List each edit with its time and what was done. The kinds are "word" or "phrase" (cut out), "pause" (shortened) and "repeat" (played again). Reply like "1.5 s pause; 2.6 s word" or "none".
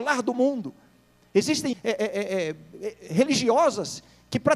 1.7 s word